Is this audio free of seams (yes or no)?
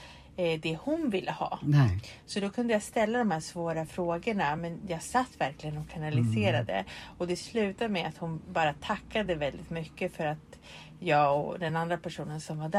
yes